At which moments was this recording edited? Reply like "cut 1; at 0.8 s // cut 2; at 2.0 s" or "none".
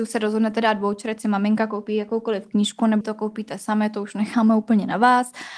cut 1; at 3.0 s